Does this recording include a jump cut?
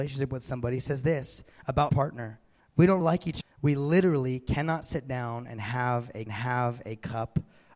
yes; 5 cuts; at 1.9 s, 2.6 s, 3.0 s, 3.4 s, 6.3 s

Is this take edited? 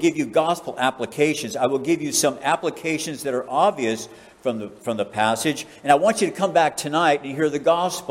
no; 0 cuts

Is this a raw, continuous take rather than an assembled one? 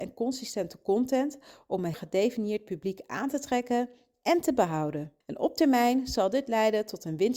no; 2 cuts; at 1.9 s, 5.2 s

